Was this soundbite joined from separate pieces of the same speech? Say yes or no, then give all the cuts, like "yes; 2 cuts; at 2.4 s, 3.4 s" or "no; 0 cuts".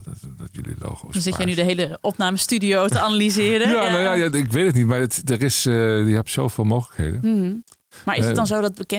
no; 0 cuts